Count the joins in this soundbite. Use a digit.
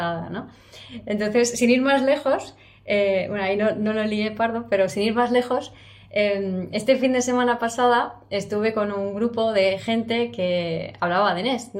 0